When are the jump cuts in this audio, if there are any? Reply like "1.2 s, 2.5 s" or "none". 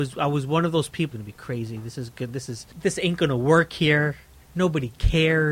1.1 s, 2.7 s